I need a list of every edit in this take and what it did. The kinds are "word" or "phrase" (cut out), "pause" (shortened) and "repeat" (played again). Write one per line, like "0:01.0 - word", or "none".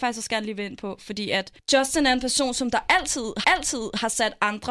0:03.4 - repeat